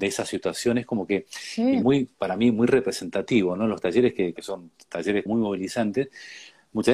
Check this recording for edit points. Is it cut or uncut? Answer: cut